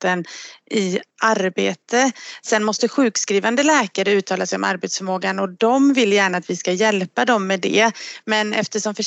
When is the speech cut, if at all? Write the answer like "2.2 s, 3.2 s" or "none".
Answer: 1.1 s